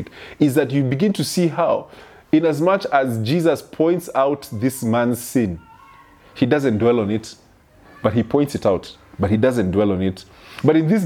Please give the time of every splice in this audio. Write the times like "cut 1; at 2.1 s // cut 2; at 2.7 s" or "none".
none